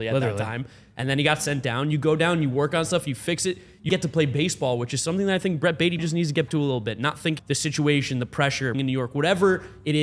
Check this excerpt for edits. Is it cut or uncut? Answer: cut